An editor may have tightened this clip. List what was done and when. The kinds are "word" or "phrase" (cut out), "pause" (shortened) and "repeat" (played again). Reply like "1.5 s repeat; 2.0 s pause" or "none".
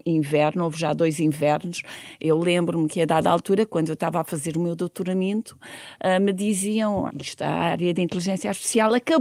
7.1 s word